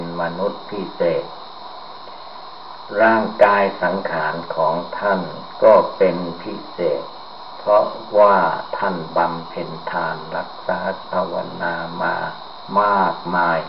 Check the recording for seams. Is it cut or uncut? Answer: cut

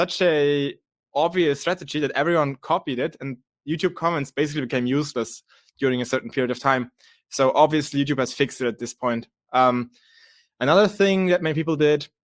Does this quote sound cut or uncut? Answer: uncut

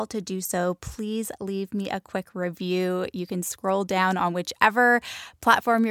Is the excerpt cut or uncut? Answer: uncut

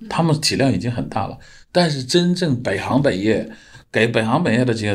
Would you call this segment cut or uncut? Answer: uncut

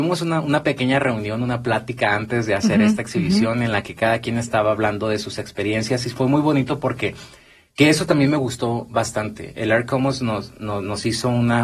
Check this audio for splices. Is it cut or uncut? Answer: uncut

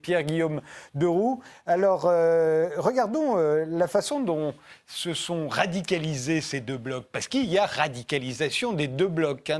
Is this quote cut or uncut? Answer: uncut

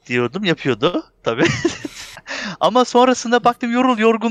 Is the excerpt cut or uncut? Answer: uncut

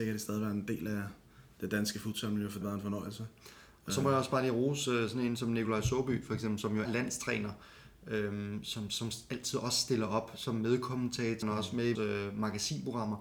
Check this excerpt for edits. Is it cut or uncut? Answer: cut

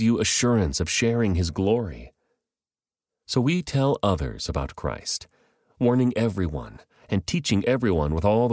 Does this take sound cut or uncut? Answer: uncut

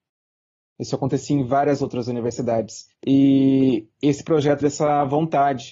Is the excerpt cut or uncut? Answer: cut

